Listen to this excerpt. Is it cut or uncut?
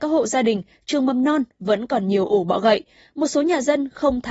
uncut